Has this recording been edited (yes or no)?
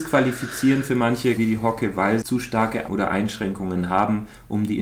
yes